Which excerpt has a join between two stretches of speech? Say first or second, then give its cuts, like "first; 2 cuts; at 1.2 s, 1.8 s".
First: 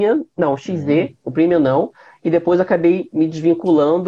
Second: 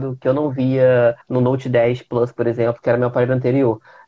second; 1 cut; at 1.2 s